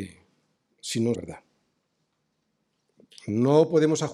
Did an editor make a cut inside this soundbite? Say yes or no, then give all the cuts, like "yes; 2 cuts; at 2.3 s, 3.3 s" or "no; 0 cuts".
yes; 1 cut; at 1.1 s